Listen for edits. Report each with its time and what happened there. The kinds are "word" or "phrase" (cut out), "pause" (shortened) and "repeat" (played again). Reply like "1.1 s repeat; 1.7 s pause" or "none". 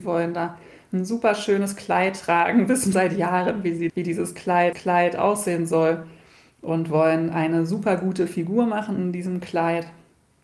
2.9 s word; 3.9 s word; 4.7 s repeat